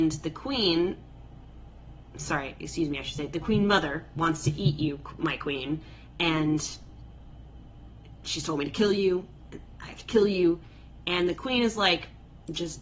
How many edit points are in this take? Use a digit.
0